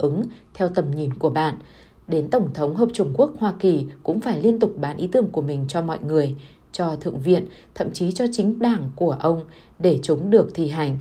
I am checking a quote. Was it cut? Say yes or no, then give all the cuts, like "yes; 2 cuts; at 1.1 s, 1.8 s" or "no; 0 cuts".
no; 0 cuts